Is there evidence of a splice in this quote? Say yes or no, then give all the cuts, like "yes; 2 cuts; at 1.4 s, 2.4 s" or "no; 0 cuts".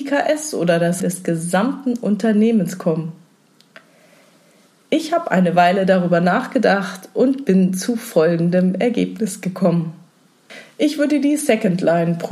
yes; 1 cut; at 1.0 s